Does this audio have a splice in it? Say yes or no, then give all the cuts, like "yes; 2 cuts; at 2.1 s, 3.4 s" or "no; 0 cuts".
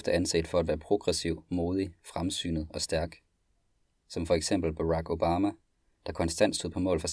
no; 0 cuts